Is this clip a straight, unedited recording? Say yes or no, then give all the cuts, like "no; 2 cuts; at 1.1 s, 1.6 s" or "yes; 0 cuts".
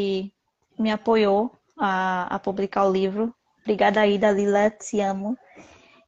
yes; 0 cuts